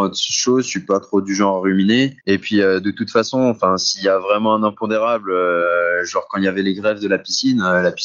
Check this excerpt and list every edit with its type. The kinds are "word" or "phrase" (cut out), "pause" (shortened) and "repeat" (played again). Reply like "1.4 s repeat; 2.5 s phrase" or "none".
2.2 s pause